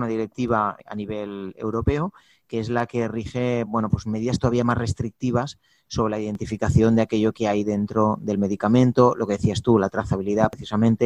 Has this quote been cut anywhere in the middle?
no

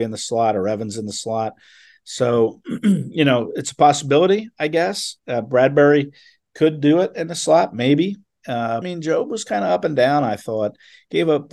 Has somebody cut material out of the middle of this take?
yes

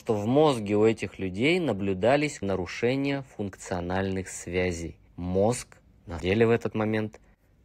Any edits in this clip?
yes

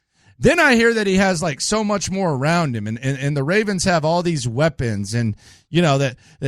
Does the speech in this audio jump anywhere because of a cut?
no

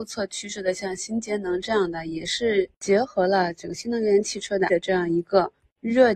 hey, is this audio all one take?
no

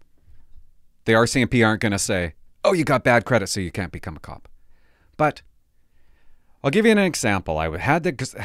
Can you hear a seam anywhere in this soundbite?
no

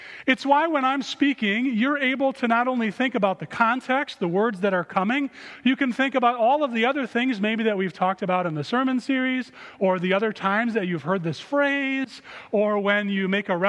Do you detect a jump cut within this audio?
no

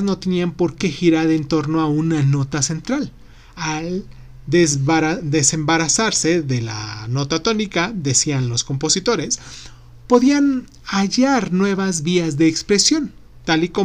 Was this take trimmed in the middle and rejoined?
no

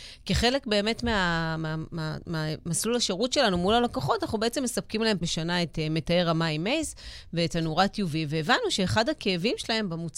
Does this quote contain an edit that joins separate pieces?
yes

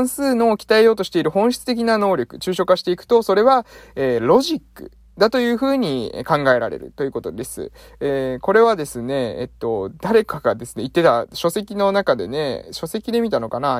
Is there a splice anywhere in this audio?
no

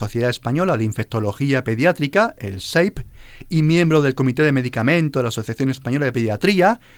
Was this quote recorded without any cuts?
yes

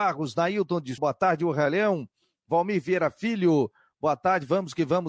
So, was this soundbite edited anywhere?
yes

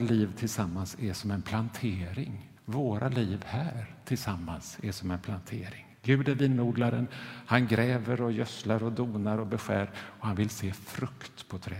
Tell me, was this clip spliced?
yes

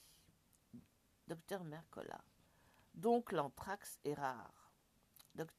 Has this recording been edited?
no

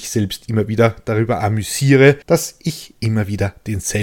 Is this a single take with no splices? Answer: no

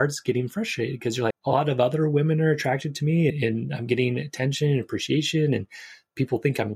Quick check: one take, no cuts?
no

